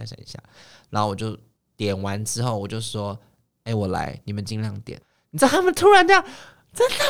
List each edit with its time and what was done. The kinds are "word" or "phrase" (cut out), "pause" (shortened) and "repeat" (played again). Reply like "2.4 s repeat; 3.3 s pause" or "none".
5.0 s pause